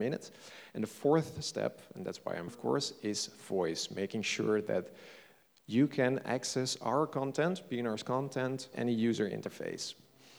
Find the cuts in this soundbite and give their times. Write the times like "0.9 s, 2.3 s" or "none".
2.5 s, 8.7 s